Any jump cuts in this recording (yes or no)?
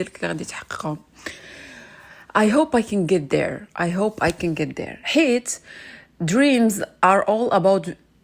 no